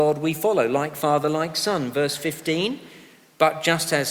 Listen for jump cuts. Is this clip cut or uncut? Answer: uncut